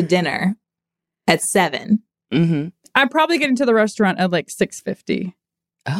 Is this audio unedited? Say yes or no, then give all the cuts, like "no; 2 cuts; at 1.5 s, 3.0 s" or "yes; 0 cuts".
yes; 0 cuts